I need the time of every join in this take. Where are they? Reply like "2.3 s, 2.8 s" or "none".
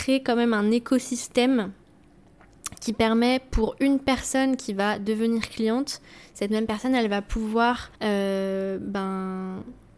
8.0 s